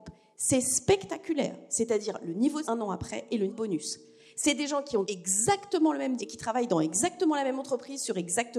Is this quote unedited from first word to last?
no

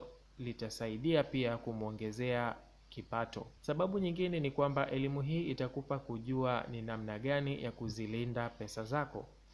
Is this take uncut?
no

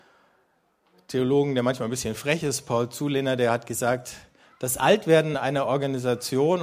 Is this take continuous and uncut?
yes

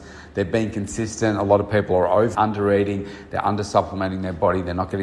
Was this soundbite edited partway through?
yes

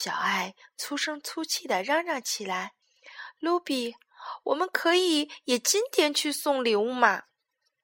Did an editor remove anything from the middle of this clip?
yes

